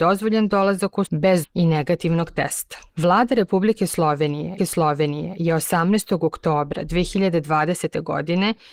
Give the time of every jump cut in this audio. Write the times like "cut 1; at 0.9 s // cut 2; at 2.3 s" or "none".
cut 1; at 1.1 s // cut 2; at 1.4 s // cut 3; at 2.9 s // cut 4; at 4.6 s